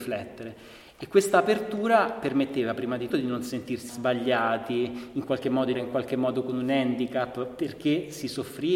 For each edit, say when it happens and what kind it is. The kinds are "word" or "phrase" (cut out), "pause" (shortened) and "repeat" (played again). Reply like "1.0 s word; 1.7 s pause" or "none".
3.1 s word; 3.9 s word; 5.7 s word